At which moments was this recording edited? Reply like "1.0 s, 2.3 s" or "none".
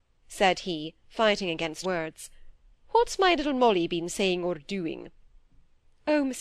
1.8 s

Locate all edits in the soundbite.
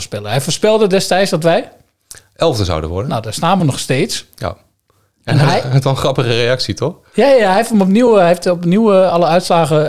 none

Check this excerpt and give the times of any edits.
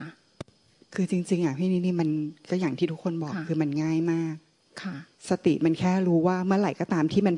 5.1 s

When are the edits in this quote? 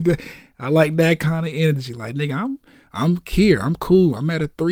none

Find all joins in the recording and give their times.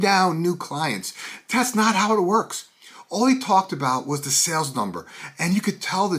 none

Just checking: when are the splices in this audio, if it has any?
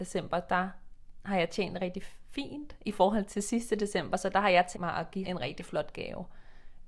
1.8 s, 4.7 s, 5.2 s

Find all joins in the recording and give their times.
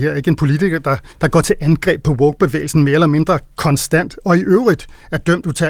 1.1 s

